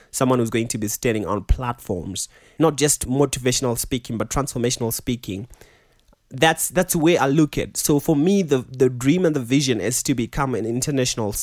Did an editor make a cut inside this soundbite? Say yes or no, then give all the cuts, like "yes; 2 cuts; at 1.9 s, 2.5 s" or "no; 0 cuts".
no; 0 cuts